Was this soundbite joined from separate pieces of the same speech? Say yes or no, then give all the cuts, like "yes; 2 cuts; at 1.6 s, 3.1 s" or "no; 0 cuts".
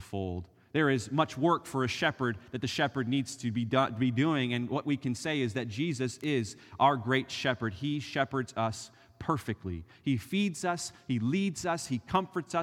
no; 0 cuts